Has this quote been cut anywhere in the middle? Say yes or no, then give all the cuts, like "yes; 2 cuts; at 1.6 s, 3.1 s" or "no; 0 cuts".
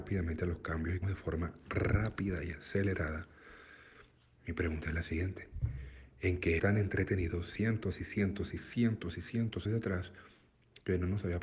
yes; 3 cuts; at 1.0 s, 6.6 s, 9.6 s